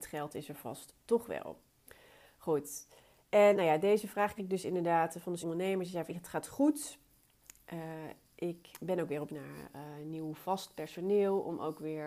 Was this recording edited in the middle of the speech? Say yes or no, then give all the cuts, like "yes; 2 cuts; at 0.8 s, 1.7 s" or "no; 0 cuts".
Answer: yes; 6 cuts; at 3.5 s, 4.4 s, 5.4 s, 6.1 s, 8.7 s, 9.3 s